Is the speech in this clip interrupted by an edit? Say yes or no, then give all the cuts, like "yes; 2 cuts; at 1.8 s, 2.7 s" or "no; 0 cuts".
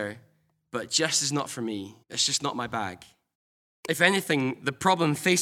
yes; 2 cuts; at 2.0 s, 3.3 s